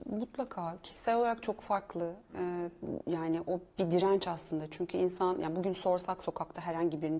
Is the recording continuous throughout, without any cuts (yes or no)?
yes